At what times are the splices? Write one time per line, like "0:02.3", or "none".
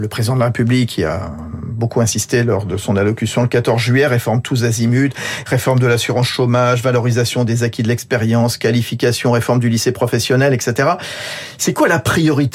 none